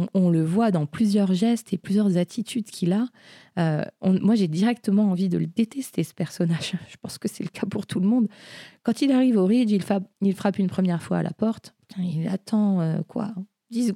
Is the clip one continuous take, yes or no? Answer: no